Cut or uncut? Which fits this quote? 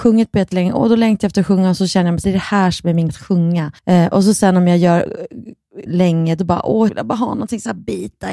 cut